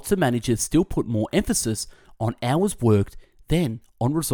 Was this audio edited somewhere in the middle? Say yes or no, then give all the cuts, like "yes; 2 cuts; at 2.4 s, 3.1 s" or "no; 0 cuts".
no; 0 cuts